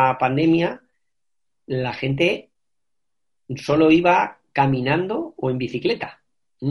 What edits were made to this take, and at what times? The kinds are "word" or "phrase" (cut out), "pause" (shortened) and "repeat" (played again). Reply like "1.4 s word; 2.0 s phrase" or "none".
none

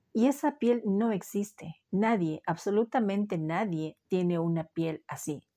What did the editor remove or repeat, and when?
none

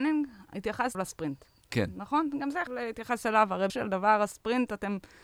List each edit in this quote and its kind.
0.9 s word; 2.7 s word; 3.7 s word

